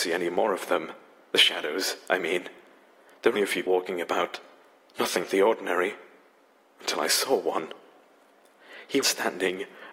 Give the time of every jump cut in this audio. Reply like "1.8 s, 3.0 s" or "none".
3.4 s, 3.7 s, 5.2 s, 9.0 s

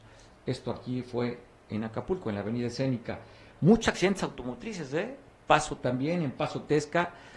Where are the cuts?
none

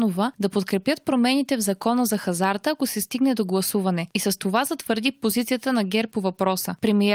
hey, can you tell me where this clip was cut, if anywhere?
none

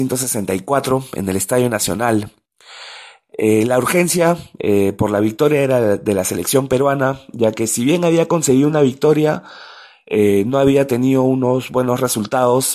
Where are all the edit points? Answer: none

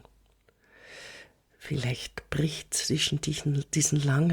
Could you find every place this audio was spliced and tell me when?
none

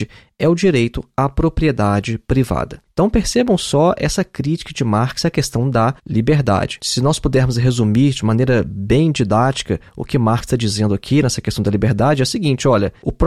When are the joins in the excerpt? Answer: 6.0 s

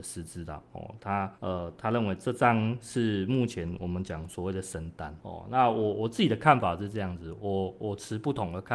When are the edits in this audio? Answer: 1.3 s, 5.2 s

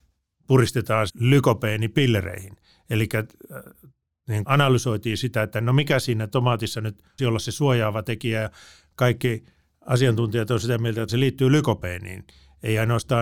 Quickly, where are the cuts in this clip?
1.1 s, 4.4 s, 7.2 s, 11.1 s

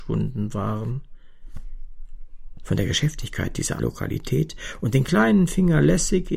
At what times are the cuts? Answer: 2.6 s, 3.8 s

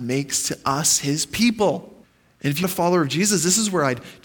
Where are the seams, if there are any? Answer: 2.0 s, 2.6 s

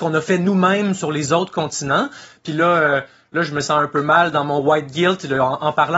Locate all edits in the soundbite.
none

